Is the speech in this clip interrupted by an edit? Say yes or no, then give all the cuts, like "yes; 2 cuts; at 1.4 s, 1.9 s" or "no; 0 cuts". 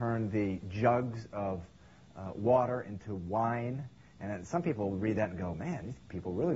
no; 0 cuts